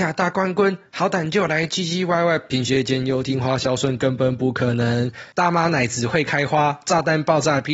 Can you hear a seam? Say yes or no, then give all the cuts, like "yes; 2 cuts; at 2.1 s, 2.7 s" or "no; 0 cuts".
yes; 1 cut; at 5.3 s